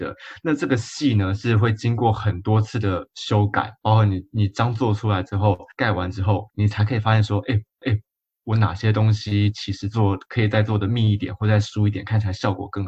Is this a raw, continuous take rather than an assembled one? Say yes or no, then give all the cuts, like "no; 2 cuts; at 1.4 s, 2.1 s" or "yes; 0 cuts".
no; 3 cuts; at 5.7 s, 6.5 s, 7.8 s